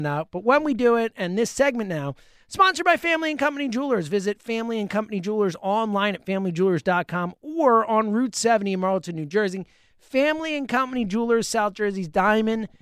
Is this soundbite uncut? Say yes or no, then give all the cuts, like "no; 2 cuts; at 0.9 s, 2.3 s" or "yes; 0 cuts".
yes; 0 cuts